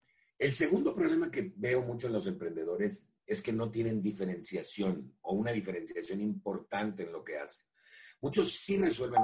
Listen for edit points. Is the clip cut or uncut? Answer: uncut